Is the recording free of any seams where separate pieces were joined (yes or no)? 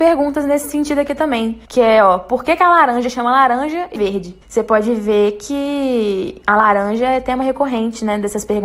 no